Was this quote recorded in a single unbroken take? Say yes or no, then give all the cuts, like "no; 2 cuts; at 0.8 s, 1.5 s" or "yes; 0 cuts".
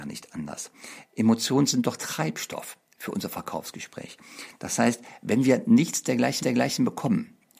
no; 2 cuts; at 2.0 s, 6.4 s